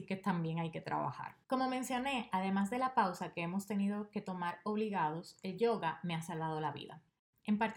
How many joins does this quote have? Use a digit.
1